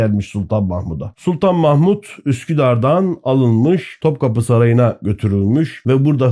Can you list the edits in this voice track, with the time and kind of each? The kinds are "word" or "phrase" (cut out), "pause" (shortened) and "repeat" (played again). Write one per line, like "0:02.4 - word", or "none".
none